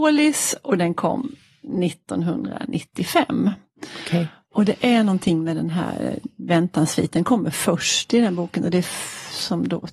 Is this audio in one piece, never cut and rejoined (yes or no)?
yes